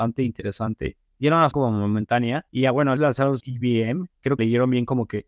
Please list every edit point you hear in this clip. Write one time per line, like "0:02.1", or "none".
0:01.5
0:02.5
0:03.0
0:03.4
0:04.4